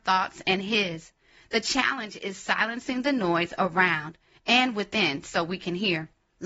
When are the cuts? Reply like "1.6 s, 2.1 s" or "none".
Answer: none